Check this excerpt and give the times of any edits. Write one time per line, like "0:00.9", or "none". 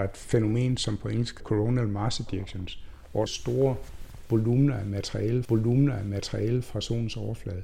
0:01.4
0:03.3
0:05.4